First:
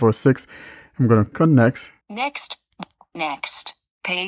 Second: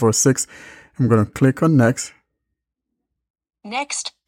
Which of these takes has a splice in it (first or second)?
first